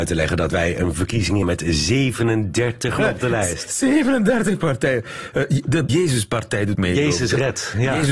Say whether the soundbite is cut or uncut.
cut